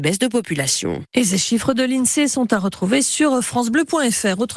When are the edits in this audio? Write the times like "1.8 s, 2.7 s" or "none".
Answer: none